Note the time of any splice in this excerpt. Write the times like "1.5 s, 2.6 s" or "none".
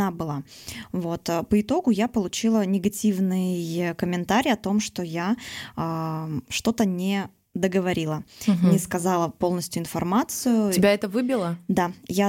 none